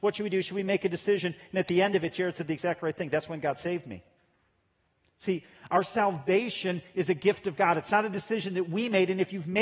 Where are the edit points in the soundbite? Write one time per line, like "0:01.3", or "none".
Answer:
none